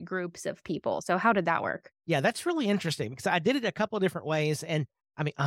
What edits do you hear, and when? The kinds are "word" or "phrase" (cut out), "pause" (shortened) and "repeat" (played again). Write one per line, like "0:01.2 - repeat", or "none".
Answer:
0:02.0 - pause